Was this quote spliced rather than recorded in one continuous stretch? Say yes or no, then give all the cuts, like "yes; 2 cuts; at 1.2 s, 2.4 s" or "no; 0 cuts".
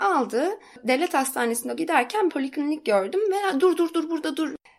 yes; 3 cuts; at 1.8 s, 2.3 s, 3.6 s